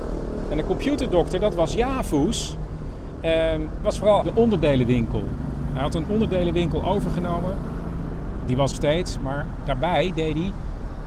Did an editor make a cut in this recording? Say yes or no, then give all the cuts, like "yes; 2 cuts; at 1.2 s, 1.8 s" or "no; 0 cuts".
yes; 3 cuts; at 3.8 s, 4.2 s, 8.7 s